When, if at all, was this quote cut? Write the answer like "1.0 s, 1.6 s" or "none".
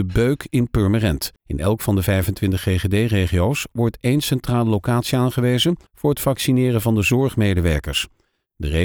1.4 s, 5.9 s